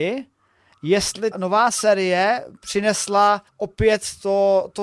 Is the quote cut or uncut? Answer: cut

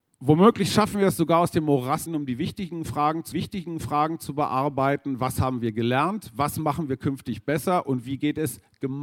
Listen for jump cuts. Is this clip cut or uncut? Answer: cut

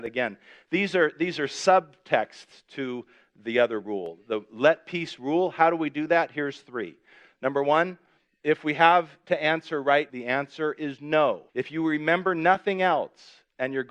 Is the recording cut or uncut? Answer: cut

